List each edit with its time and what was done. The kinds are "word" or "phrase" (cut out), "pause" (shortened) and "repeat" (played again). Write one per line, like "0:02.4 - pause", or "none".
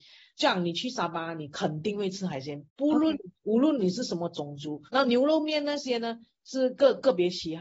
0:02.7 - pause
0:03.4 - pause
0:04.9 - pause